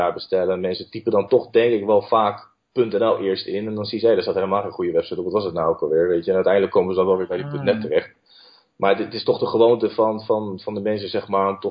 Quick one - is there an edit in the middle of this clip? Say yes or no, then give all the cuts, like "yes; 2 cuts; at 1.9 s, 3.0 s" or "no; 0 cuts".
no; 0 cuts